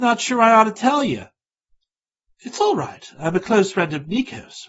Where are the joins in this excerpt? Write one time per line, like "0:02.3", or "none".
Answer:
none